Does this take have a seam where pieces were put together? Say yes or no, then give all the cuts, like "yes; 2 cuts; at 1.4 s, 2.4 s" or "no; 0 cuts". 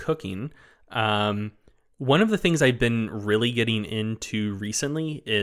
no; 0 cuts